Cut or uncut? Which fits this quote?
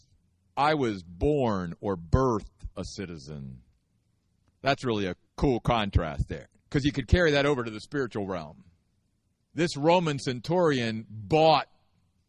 cut